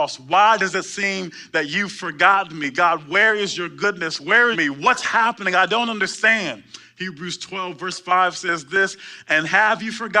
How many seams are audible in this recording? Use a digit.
1